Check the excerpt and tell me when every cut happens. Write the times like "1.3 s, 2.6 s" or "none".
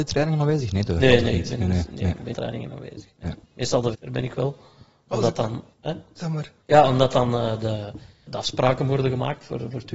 2.3 s, 3.4 s, 3.9 s, 5.7 s, 6.6 s, 8.3 s

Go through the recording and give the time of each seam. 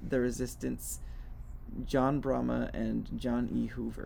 none

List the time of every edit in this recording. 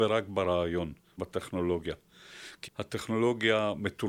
1.2 s, 2.7 s

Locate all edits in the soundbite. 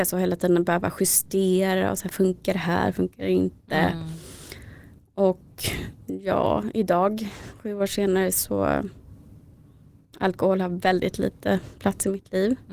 none

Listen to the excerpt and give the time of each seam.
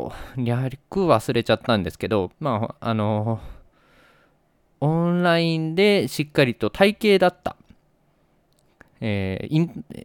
2.3 s

